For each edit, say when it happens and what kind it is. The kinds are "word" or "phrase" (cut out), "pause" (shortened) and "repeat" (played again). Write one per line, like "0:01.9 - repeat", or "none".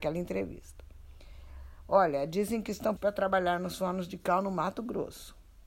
0:03.0 - phrase